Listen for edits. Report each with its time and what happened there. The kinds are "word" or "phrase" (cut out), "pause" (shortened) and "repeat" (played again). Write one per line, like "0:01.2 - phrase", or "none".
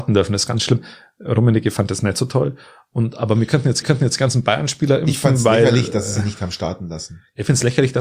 0:03.8 - repeat